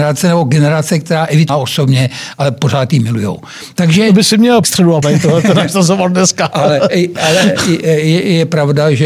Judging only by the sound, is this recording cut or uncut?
cut